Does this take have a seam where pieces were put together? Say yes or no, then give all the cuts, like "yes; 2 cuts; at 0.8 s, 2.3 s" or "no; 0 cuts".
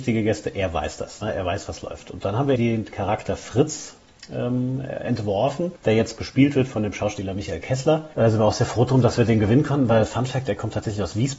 yes; 1 cut; at 2.6 s